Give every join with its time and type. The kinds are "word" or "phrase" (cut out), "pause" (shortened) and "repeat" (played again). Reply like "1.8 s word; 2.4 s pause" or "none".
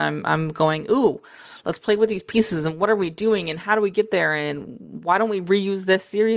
none